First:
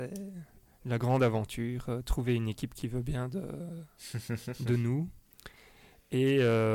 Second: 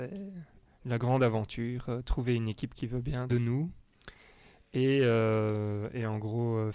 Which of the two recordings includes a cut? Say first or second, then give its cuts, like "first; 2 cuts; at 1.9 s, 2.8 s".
second; 1 cut; at 3.3 s